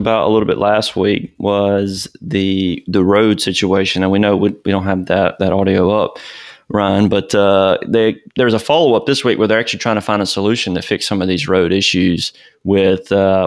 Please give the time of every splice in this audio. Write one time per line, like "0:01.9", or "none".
0:08.3